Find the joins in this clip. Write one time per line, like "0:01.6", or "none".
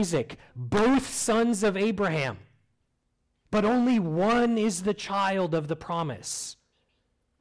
none